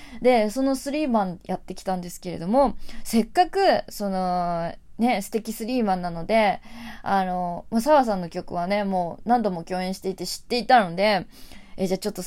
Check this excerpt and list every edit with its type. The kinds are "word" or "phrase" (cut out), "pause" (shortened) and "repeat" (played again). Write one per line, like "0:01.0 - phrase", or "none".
none